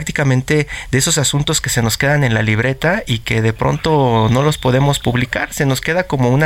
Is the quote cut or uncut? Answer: uncut